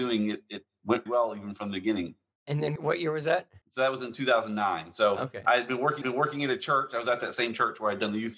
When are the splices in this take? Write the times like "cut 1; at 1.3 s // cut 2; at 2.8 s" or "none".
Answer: cut 1; at 1.1 s // cut 2; at 2.3 s // cut 3; at 2.8 s // cut 4; at 3.6 s // cut 5; at 6.0 s